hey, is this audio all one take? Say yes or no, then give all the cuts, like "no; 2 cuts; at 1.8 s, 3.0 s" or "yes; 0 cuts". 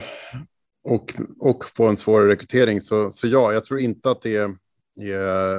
yes; 0 cuts